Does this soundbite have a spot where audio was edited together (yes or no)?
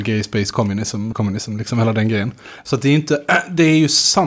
yes